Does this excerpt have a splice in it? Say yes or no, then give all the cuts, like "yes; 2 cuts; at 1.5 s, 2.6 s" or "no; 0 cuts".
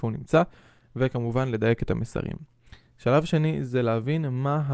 no; 0 cuts